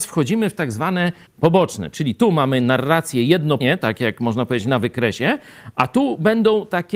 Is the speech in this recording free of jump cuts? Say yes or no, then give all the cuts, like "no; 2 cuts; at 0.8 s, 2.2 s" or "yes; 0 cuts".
no; 2 cuts; at 1.3 s, 3.6 s